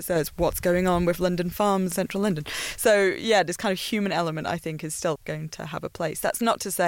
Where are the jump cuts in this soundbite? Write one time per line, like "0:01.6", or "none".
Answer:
0:01.9
0:05.2